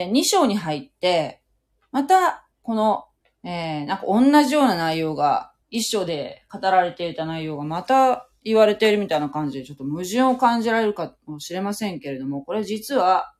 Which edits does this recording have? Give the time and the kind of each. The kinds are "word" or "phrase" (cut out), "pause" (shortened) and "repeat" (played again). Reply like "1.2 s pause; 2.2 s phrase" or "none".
2.5 s pause; 3.2 s pause; 5.6 s pause